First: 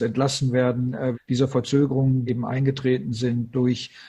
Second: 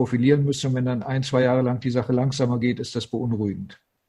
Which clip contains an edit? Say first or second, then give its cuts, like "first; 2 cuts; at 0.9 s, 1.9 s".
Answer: first; 2 cuts; at 1.1 s, 2.3 s